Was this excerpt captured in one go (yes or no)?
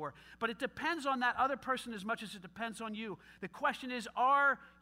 yes